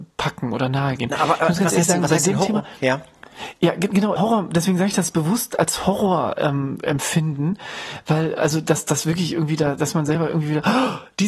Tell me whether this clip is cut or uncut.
cut